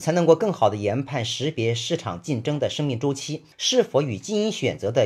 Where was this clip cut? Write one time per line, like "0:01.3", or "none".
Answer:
0:03.5

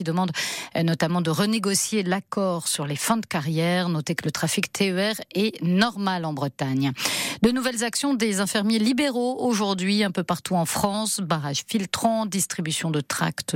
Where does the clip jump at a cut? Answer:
none

